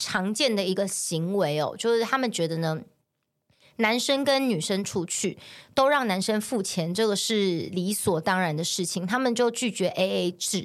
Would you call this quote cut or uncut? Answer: uncut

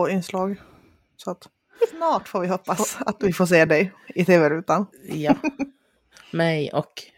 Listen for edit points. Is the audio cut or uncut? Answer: uncut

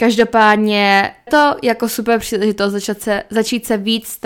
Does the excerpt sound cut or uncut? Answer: cut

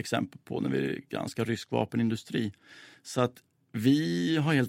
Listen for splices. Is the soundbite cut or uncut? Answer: uncut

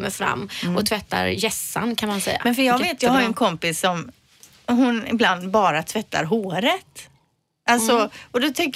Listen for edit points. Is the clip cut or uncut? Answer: uncut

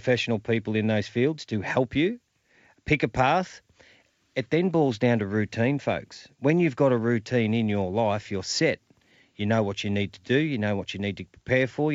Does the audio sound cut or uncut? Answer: uncut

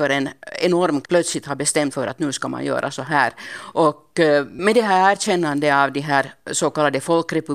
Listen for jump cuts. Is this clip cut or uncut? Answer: cut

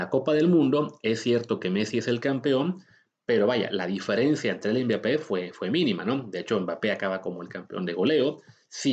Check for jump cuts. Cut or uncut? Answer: uncut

